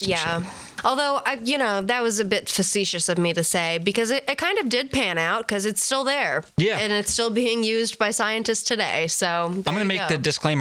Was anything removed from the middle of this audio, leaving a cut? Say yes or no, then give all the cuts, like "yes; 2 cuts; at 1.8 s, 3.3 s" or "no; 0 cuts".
yes; 1 cut; at 6.5 s